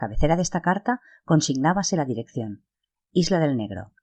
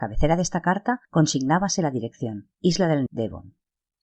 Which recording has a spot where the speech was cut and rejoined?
second; 3 cuts; at 1.0 s, 2.5 s, 3.1 s

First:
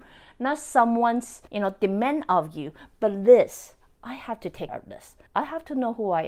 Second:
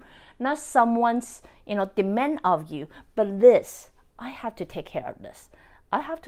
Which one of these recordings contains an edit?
first; 3 cuts; at 1.5 s, 4.7 s, 5.3 s

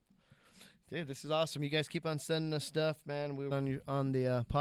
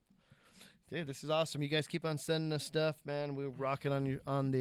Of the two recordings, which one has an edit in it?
first; 1 cut; at 3.5 s

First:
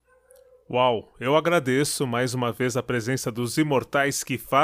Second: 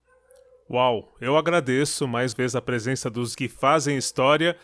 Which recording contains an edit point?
second; 2 cuts; at 2.3 s, 3.3 s

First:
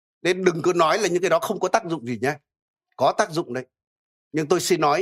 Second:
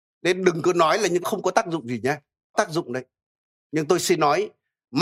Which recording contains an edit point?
second; 2 cuts; at 1.2 s, 2.5 s

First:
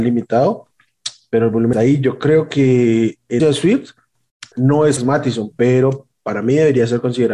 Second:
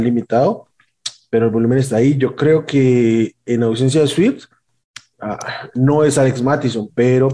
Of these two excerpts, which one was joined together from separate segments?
first; 4 cuts; at 1.7 s, 3.4 s, 4.5 s, 5.0 s

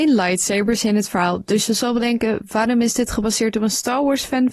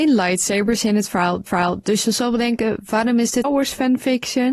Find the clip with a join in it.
second; 2 cuts; at 1.5 s, 3.4 s

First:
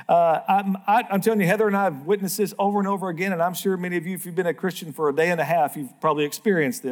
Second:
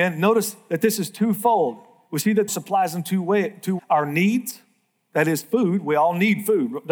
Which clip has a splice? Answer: second; 2 cuts; at 2.5 s, 3.8 s

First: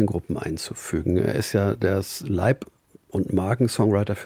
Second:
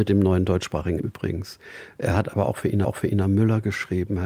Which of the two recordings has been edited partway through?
second; 2 cuts; at 1.0 s, 2.8 s

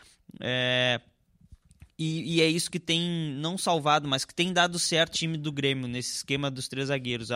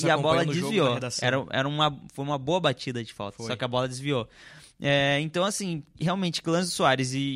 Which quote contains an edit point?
first; 1 cut; at 5.1 s

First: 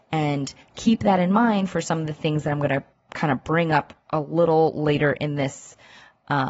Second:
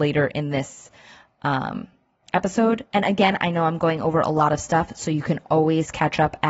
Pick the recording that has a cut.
first; 1 cut; at 2.9 s

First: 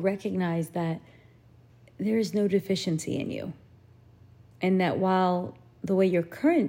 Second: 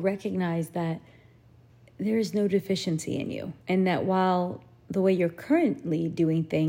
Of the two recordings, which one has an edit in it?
second; 1 cut; at 3.6 s

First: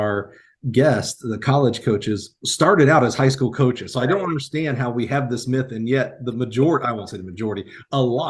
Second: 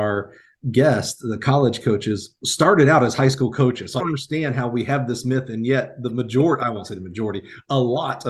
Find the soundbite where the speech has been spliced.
second; 1 cut; at 4.0 s

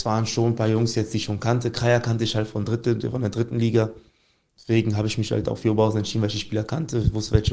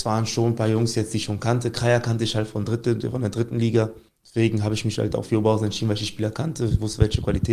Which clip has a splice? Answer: second; 1 cut; at 4.1 s

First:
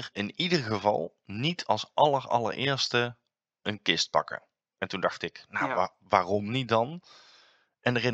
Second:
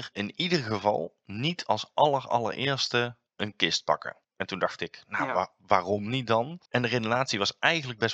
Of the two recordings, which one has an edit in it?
second; 3 cuts; at 3.3 s, 4.2 s, 6.6 s

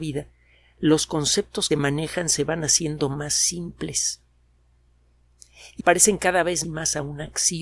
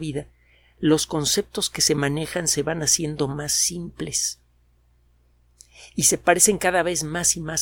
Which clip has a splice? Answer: first; 3 cuts; at 1.7 s, 5.8 s, 6.6 s

